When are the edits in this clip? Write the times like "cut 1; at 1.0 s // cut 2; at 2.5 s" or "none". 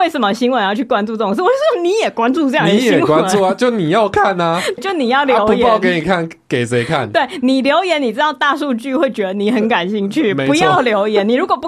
cut 1; at 4.8 s

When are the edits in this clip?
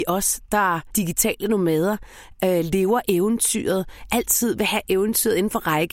cut 1; at 0.9 s

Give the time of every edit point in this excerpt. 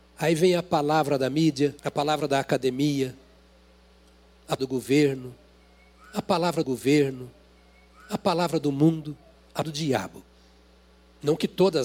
cut 1; at 1.8 s // cut 2; at 4.6 s // cut 3; at 6.6 s // cut 4; at 9.6 s

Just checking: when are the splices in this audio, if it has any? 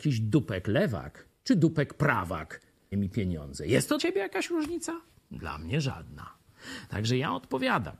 cut 1; at 2.9 s // cut 2; at 4.0 s

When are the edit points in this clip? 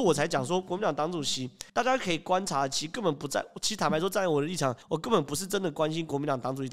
cut 1; at 1.7 s // cut 2; at 4.8 s

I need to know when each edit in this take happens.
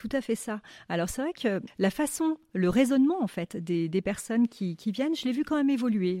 none

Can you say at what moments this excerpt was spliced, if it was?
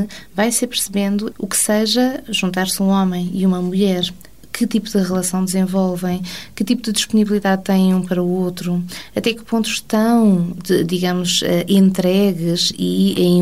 cut 1; at 1.3 s

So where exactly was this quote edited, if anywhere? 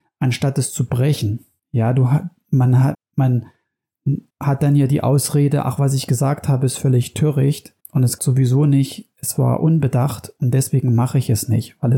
cut 1; at 1.6 s // cut 2; at 2.9 s // cut 3; at 4.3 s // cut 4; at 7.8 s // cut 5; at 8.2 s

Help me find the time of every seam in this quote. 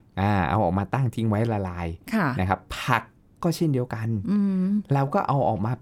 none

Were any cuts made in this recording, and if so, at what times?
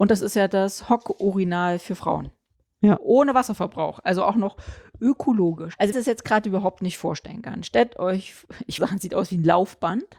cut 1; at 5.9 s // cut 2; at 8.8 s

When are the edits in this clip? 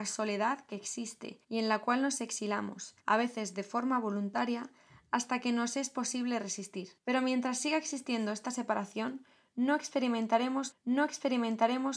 cut 1; at 1.4 s // cut 2; at 3.0 s // cut 3; at 7.0 s // cut 4; at 10.7 s

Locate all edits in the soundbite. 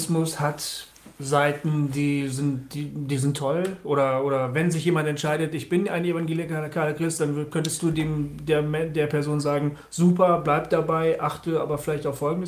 cut 1; at 1.1 s

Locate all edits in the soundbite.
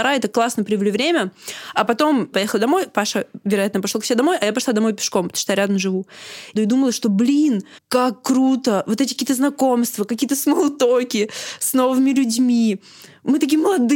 cut 1; at 2.3 s // cut 2; at 6.6 s // cut 3; at 7.8 s

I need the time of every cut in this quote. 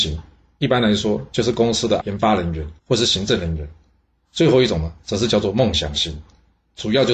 cut 1; at 2.0 s // cut 2; at 2.8 s

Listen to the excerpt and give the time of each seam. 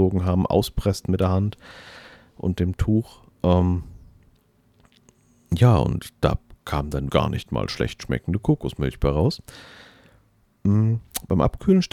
cut 1; at 7.1 s

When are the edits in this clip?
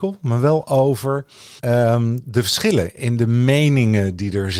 cut 1; at 1.6 s

